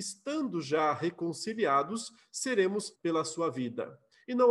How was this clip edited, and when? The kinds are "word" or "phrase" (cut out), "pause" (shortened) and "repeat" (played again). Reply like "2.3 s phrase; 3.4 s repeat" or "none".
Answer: 2.9 s word